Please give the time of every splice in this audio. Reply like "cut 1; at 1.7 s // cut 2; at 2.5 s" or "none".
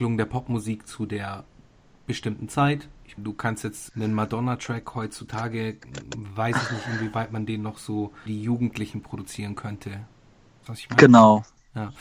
cut 1; at 3.2 s // cut 2; at 3.9 s // cut 3; at 8.3 s // cut 4; at 10.7 s